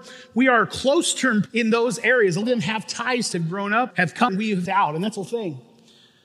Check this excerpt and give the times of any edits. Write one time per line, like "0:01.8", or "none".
0:01.5
0:02.4
0:03.3
0:03.9
0:04.3
0:04.7
0:05.2

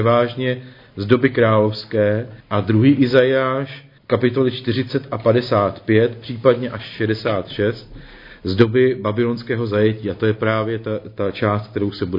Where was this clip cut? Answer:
0:02.4
0:04.0

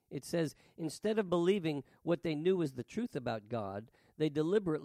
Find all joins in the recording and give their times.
none

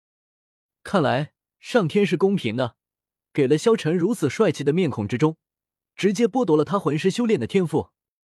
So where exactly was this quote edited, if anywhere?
none

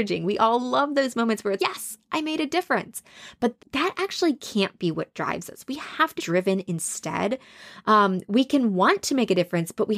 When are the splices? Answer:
0:01.6
0:03.6
0:06.2

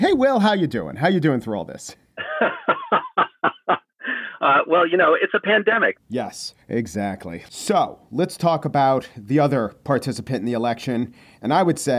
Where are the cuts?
0:06.6

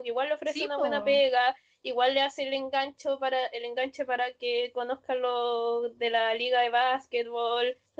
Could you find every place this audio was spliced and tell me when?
none

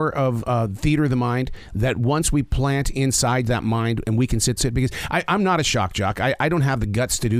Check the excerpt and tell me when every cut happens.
0:04.6

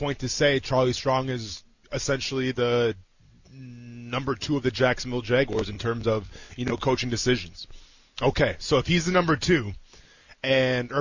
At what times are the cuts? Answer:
none

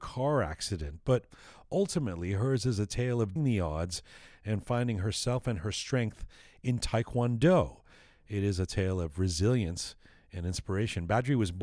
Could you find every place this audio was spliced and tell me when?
0:03.4

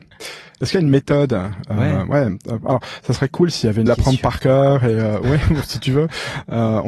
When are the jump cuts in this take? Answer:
0:03.9

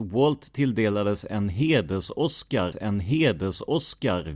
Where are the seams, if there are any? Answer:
0:02.7

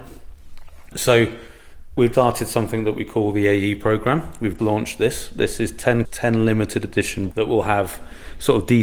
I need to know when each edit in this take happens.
0:02.1
0:04.6
0:06.0
0:07.3

